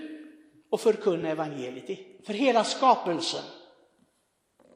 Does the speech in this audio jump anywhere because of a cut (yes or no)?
no